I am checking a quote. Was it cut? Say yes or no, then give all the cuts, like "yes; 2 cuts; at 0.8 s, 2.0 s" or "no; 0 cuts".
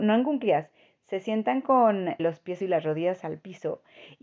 yes; 2 cuts; at 2.2 s, 2.6 s